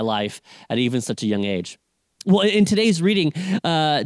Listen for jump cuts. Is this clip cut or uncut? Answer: uncut